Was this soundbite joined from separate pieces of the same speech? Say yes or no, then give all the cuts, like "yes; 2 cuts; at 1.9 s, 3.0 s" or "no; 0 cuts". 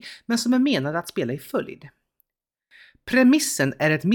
no; 0 cuts